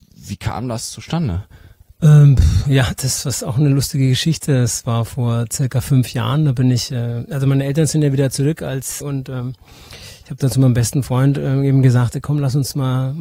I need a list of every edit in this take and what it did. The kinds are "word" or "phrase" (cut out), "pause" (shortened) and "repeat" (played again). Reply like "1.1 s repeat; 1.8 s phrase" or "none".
9.0 s phrase